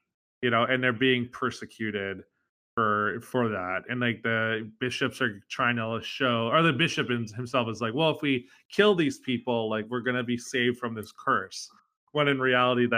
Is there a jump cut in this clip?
no; 0 cuts

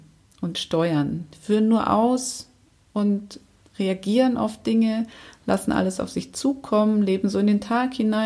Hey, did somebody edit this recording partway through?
no; 0 cuts

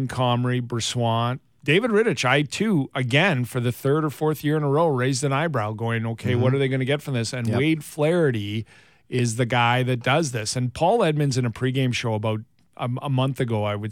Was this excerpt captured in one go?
yes; 0 cuts

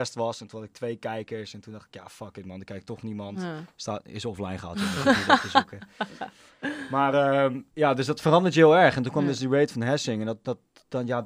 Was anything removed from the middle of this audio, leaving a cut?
yes; 1 cut; at 7.7 s

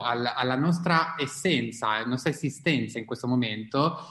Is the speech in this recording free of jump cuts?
yes; 0 cuts

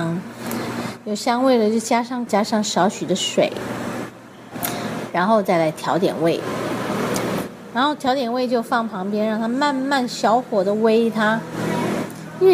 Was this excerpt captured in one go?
no; 1 cut; at 2.3 s

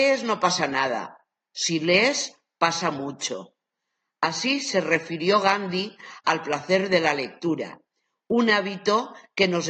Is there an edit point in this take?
no; 0 cuts

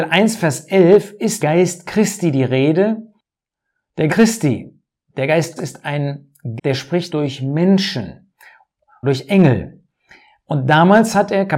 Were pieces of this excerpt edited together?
yes; 6 cuts; at 1.4 s, 4.1 s, 5.6 s, 6.6 s, 7.1 s, 9.0 s

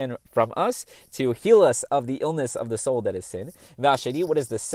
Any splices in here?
no; 0 cuts

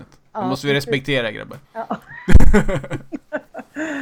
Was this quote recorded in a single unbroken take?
no; 1 cut; at 1.6 s

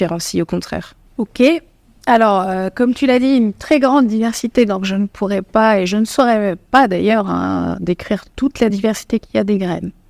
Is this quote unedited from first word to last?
yes; 0 cuts

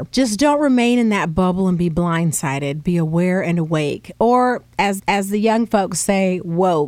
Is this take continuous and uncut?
no; 1 cut; at 5.0 s

